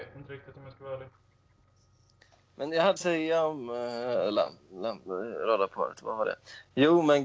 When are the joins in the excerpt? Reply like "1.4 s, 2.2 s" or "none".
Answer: 3.0 s

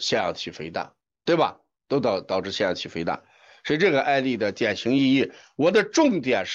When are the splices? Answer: none

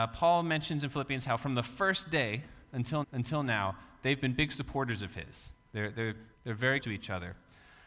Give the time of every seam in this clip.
3.0 s, 6.3 s, 6.8 s

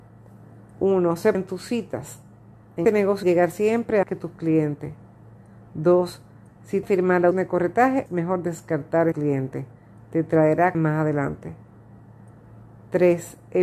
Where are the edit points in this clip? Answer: 1.3 s, 2.8 s, 3.2 s, 4.0 s, 6.8 s, 7.3 s, 8.1 s, 9.1 s, 10.7 s

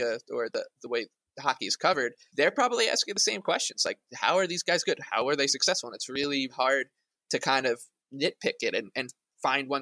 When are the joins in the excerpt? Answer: 2.3 s, 6.5 s, 8.0 s

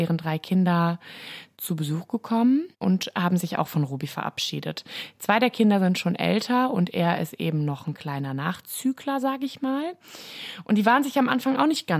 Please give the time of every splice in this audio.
2.7 s

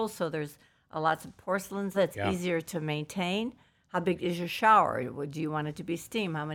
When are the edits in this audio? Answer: 1.9 s

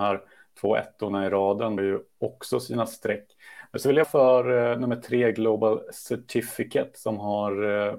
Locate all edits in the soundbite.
1.8 s, 4.0 s

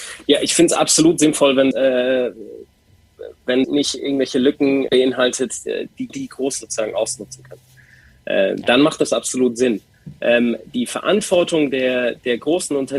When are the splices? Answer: 1.7 s, 3.6 s, 4.9 s, 6.1 s, 6.6 s, 10.7 s

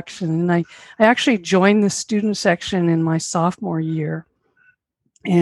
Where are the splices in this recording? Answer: none

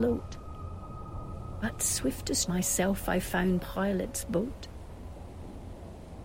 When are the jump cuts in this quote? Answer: 2.5 s, 3.6 s

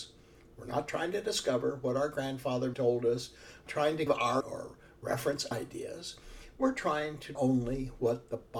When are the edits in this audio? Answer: 2.7 s, 3.7 s, 4.1 s, 4.4 s, 5.5 s, 7.4 s

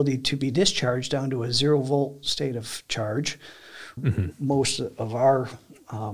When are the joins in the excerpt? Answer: 4.0 s

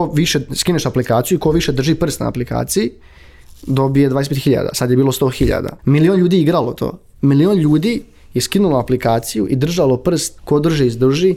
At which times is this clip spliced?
5.8 s, 10.4 s

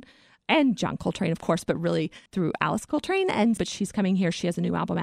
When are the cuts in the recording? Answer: 2.3 s, 3.6 s

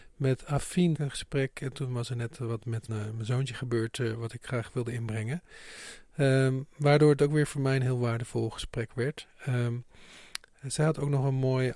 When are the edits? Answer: 0.9 s, 2.9 s

